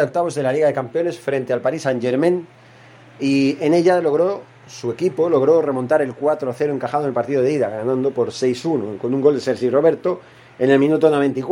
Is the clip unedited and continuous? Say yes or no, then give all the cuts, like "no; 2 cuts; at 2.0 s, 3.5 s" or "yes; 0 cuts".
yes; 0 cuts